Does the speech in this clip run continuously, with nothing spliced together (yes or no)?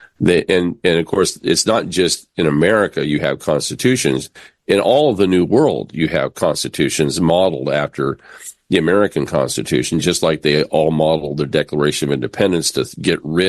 yes